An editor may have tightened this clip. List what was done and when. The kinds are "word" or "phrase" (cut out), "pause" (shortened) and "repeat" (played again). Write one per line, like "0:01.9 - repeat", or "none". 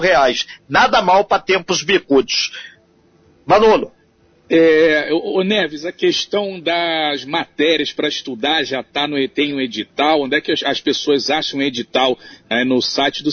none